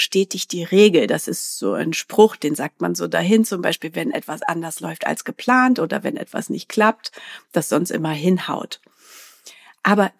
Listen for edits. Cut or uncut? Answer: uncut